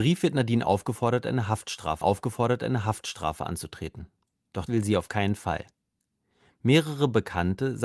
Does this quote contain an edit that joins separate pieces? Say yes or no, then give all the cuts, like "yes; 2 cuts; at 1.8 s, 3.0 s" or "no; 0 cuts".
yes; 2 cuts; at 2.0 s, 4.7 s